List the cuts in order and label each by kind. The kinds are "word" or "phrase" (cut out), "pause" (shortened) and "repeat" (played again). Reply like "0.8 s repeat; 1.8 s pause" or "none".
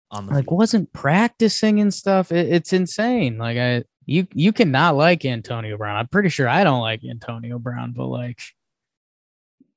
3.9 s pause